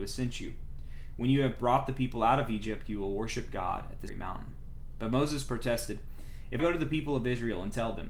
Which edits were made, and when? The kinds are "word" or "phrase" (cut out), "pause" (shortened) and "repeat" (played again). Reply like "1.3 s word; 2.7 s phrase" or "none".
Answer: 4.1 s word; 6.6 s word